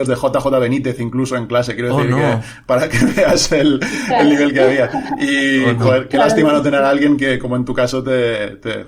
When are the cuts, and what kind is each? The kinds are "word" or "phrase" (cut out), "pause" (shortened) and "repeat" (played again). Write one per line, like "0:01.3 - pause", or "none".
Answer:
none